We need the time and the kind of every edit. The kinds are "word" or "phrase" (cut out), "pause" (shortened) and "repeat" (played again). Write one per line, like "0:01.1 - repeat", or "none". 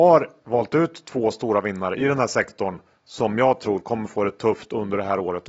none